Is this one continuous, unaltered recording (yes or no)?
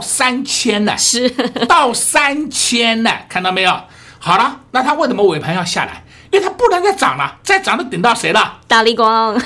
yes